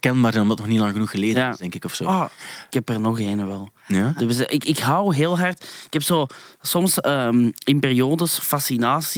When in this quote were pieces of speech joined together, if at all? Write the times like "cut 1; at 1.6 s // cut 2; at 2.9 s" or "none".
none